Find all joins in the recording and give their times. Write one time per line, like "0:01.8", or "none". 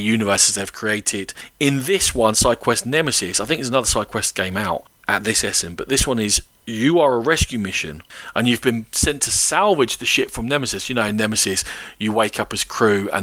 none